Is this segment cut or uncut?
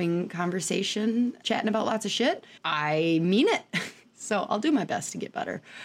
cut